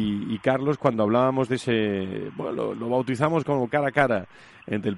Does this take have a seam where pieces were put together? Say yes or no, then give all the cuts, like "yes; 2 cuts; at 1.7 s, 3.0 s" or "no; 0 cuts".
no; 0 cuts